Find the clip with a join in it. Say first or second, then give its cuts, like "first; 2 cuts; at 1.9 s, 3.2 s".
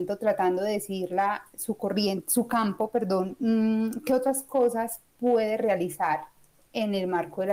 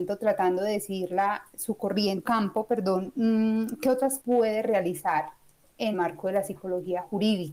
second; 3 cuts; at 2.2 s, 4.2 s, 5.9 s